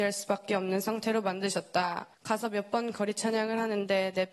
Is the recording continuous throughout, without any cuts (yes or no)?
no